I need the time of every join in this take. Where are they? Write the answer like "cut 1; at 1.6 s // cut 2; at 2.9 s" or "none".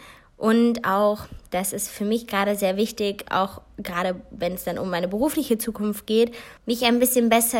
cut 1; at 6.6 s